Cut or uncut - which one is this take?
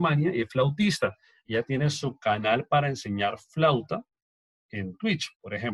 uncut